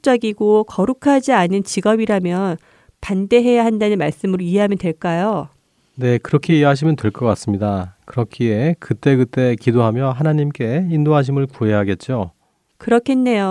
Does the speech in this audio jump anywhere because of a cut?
no; 0 cuts

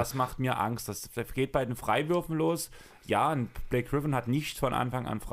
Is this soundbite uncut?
yes; 0 cuts

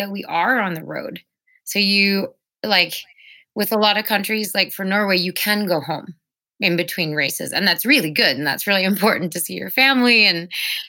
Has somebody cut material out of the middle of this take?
no; 0 cuts

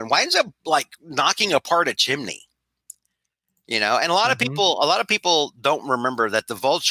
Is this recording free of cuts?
yes; 0 cuts

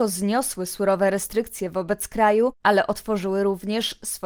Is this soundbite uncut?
yes; 0 cuts

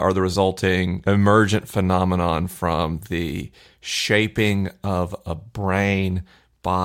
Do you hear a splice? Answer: no; 0 cuts

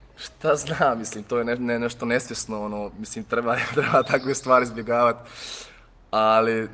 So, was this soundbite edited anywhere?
no; 0 cuts

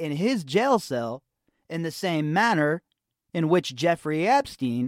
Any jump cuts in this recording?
no; 0 cuts

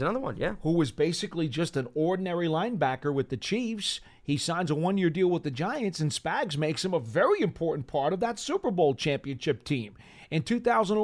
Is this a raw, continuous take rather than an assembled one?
yes; 0 cuts

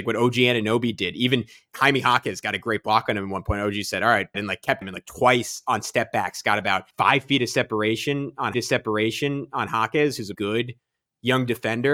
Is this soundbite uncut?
no; 6 cuts; at 1.7 s, 4.3 s, 4.8 s, 6.9 s, 8.5 s, 10.3 s

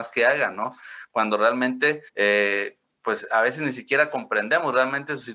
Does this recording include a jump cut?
yes; 1 cut; at 2.1 s

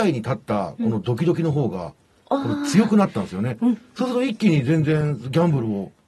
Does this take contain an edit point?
no; 0 cuts

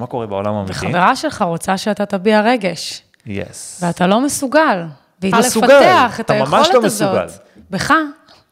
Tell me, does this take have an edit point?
yes; 1 cut; at 5.3 s

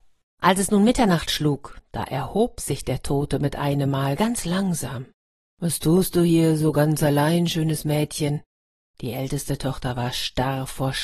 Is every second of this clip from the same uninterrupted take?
yes; 0 cuts

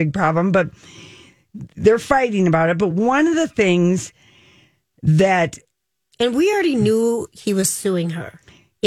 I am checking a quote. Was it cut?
no; 0 cuts

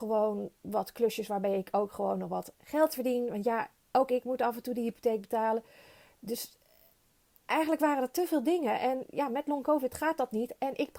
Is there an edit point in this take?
no; 0 cuts

